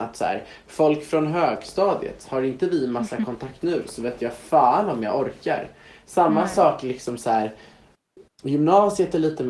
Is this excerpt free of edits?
no; 1 cut; at 3.6 s

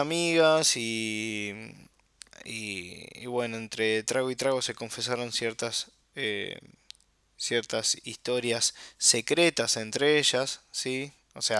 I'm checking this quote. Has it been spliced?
no; 0 cuts

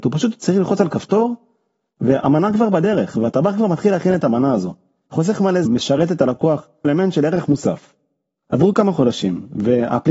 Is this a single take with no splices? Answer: no; 3 cuts; at 3.1 s, 5.7 s, 6.8 s

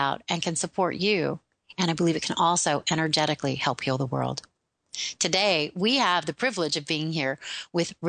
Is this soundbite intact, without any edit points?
yes; 0 cuts

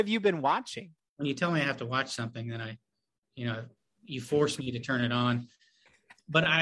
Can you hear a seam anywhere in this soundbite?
no; 0 cuts

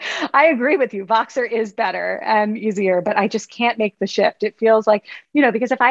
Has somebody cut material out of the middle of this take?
no; 0 cuts

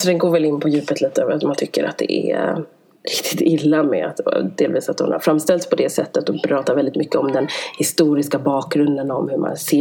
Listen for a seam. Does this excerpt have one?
no; 0 cuts

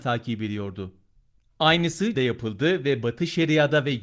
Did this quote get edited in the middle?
yes; 1 cut; at 2.1 s

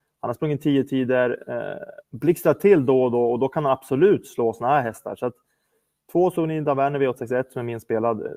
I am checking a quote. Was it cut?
no; 0 cuts

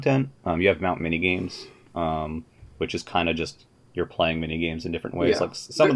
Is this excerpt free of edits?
yes; 0 cuts

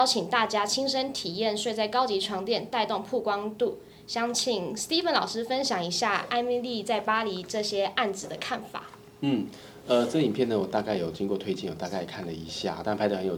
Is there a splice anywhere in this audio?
no; 0 cuts

